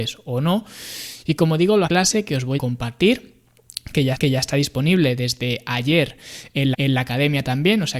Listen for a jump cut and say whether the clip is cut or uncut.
cut